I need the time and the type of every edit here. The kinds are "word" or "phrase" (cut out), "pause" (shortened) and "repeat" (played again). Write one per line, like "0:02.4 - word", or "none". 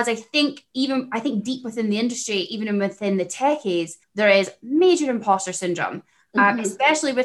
0:04.0 - pause